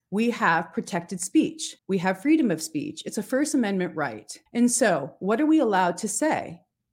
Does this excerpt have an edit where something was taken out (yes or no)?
yes